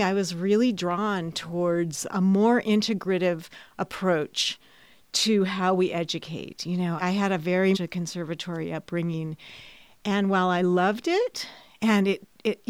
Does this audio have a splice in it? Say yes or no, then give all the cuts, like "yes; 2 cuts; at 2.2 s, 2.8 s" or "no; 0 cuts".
yes; 3 cuts; at 2.1 s, 7.0 s, 7.7 s